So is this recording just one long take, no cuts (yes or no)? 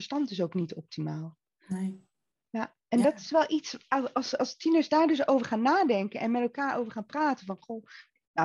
yes